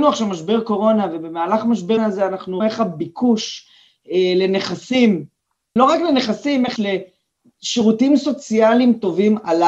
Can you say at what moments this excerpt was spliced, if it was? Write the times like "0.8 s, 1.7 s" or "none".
2.0 s, 2.6 s, 5.8 s, 6.8 s